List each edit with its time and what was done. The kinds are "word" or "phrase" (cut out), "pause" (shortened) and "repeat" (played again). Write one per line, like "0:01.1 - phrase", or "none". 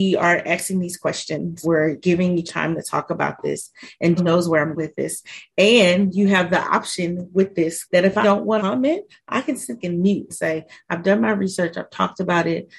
0:01.6 - word
0:02.5 - word
0:04.2 - word
0:04.8 - word
0:07.8 - word
0:08.2 - word
0:08.6 - word
0:09.8 - word
0:10.3 - word